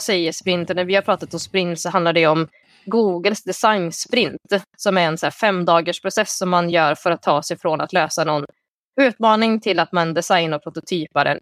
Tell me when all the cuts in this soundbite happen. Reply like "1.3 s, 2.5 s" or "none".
none

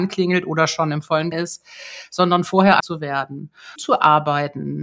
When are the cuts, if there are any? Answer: 1.3 s, 2.8 s, 3.8 s

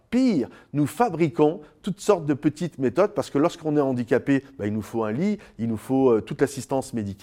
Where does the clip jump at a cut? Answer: none

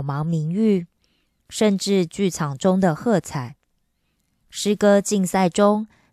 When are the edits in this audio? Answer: none

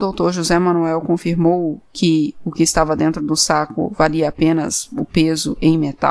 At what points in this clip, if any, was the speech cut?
none

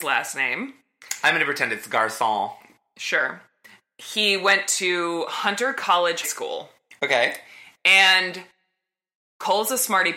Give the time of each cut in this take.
6.2 s

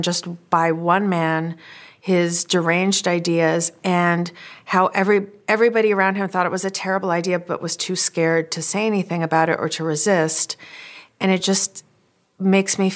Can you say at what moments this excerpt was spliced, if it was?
none

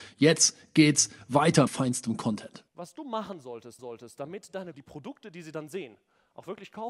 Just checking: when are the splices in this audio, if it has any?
1.7 s, 3.8 s, 4.7 s

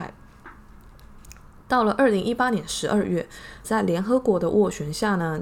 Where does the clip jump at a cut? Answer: 3.6 s

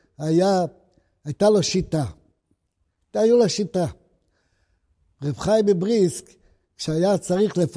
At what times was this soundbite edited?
none

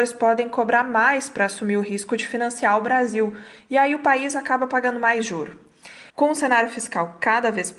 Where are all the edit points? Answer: 6.1 s

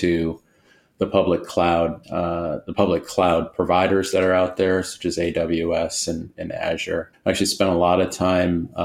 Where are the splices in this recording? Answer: 2.0 s, 7.1 s

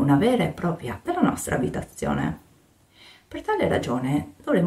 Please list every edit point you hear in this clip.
1.0 s

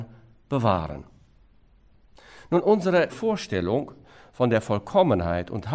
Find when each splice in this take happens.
3.1 s

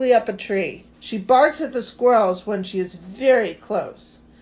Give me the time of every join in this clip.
0.9 s

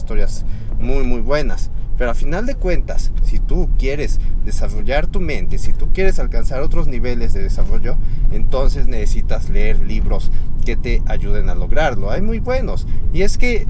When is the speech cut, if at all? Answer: none

